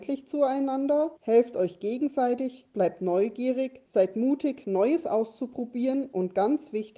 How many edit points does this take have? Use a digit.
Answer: 2